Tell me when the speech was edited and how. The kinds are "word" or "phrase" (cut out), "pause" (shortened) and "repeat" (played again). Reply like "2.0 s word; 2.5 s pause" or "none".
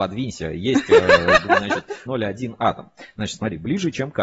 2.1 s phrase